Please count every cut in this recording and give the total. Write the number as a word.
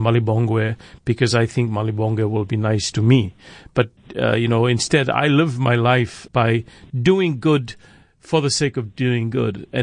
one